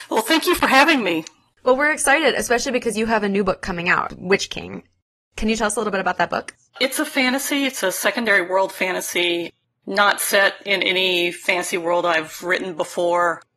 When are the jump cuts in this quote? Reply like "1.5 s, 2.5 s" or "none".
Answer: none